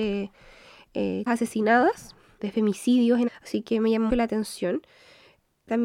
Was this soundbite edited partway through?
yes; 4 cuts; at 1.3 s, 2.4 s, 3.3 s, 4.1 s

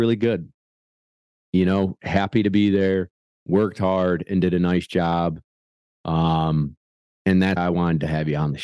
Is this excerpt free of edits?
no; 2 cuts; at 2.0 s, 7.6 s

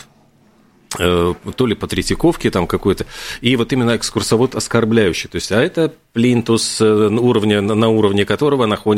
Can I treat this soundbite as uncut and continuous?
yes; 0 cuts

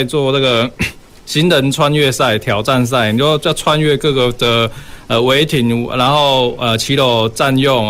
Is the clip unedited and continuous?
yes; 0 cuts

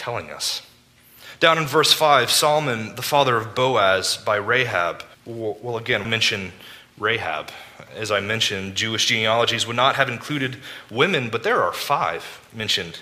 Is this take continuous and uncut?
no; 2 cuts; at 5.1 s, 6.0 s

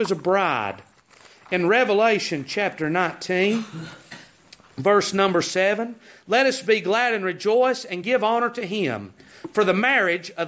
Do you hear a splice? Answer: no; 0 cuts

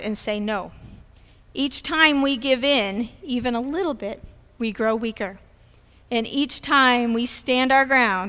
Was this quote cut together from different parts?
no; 0 cuts

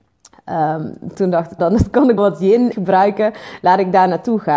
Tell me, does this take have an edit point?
yes; 4 cuts; at 1.1 s, 1.6 s, 2.2 s, 2.7 s

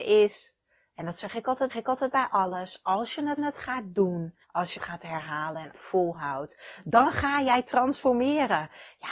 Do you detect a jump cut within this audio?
yes; 5 cuts; at 1.7 s, 3.4 s, 4.4 s, 4.8 s, 5.7 s

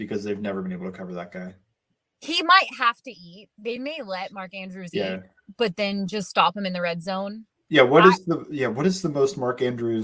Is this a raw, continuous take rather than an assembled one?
yes; 0 cuts

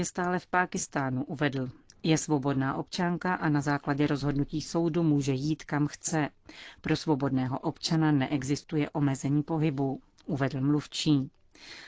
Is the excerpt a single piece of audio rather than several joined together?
yes; 0 cuts

